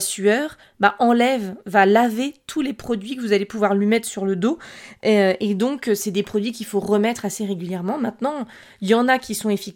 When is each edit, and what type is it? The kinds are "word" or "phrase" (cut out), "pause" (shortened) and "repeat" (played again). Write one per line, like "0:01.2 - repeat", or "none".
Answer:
none